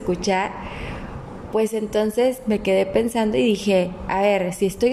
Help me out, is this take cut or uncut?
uncut